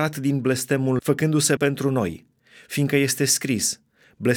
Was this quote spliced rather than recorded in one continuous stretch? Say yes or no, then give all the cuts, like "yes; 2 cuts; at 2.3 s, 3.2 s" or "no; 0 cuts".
yes; 2 cuts; at 1.0 s, 1.6 s